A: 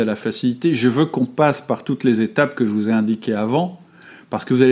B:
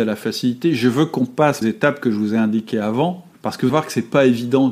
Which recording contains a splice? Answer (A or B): B